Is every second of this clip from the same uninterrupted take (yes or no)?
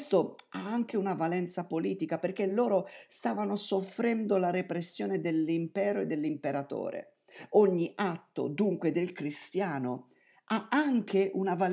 yes